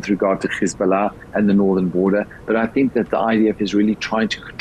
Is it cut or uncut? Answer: uncut